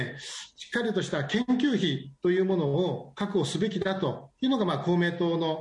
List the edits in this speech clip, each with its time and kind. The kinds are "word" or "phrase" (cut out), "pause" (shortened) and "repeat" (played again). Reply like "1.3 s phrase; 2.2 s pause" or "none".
2.2 s pause